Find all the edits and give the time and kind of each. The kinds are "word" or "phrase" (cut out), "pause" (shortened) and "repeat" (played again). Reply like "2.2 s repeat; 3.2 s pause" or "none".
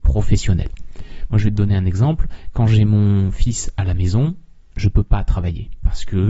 none